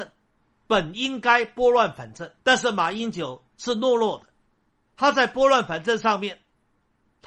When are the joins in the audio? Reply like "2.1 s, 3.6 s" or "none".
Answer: 2.4 s, 3.5 s

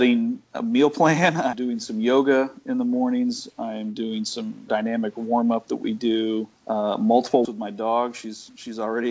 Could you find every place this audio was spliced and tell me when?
1.5 s, 4.7 s, 6.6 s, 7.4 s

